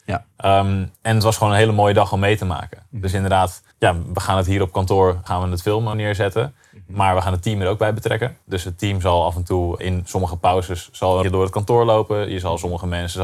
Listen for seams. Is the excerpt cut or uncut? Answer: cut